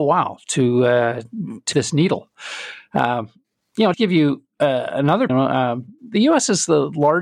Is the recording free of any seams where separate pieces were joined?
no; 4 cuts; at 1.7 s, 3.9 s, 5.3 s, 6.0 s

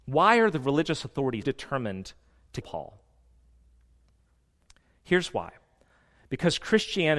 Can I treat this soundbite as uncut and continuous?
no; 2 cuts; at 1.4 s, 2.6 s

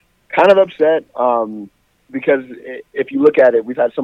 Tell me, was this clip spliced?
no; 0 cuts

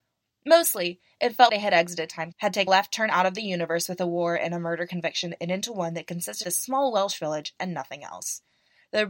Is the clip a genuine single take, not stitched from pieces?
no; 4 cuts; at 1.5 s, 2.3 s, 2.7 s, 6.4 s

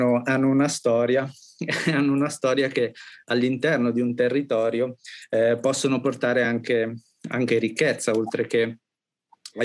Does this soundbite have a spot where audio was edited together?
no; 0 cuts

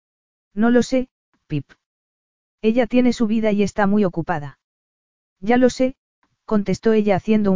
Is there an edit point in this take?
no; 0 cuts

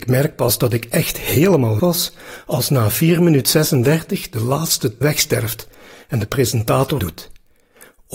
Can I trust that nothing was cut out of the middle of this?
no; 3 cuts; at 1.8 s, 5.0 s, 7.0 s

